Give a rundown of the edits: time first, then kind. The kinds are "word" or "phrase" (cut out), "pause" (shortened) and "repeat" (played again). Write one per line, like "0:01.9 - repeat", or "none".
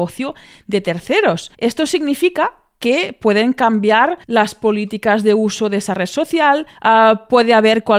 0:01.5 - pause
0:04.2 - pause
0:06.7 - pause